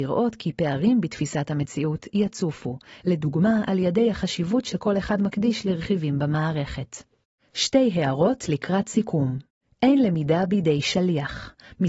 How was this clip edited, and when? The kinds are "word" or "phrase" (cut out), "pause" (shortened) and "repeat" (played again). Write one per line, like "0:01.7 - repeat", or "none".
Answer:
none